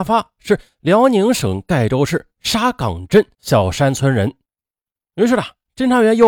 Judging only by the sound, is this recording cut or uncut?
uncut